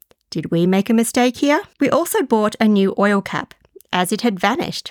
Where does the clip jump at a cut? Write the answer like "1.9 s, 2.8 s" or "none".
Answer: 1.7 s